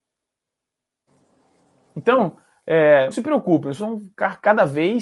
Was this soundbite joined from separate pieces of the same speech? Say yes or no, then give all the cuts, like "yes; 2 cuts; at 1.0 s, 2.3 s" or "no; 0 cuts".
yes; 2 cuts; at 3.1 s, 3.8 s